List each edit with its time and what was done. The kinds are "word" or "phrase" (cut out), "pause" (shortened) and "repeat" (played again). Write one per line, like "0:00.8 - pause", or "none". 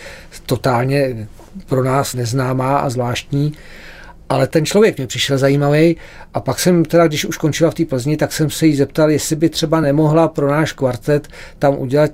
none